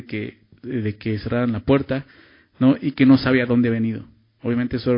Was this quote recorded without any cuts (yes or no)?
yes